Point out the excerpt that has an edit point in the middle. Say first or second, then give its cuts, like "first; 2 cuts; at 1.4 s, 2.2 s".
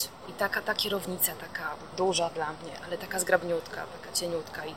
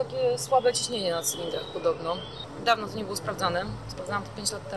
first; 1 cut; at 1.9 s